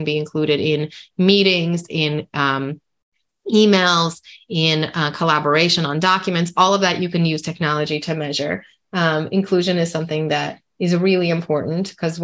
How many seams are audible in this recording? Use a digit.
0